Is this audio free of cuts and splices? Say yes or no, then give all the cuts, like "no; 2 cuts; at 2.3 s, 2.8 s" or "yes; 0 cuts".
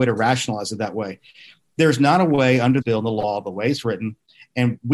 no; 1 cut; at 2.8 s